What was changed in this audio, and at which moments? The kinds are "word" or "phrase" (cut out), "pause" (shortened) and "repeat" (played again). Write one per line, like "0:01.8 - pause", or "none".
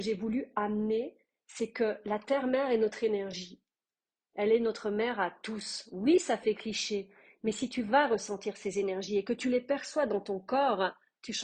none